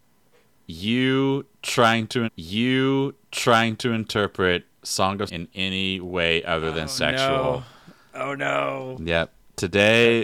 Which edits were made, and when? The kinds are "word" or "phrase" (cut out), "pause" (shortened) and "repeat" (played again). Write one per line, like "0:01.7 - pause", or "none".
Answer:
0:02.3 - repeat
0:05.3 - word